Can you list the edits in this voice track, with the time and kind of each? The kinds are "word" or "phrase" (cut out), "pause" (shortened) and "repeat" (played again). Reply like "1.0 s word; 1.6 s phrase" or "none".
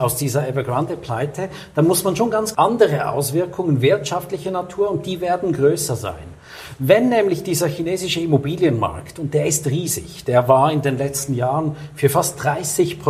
2.5 s phrase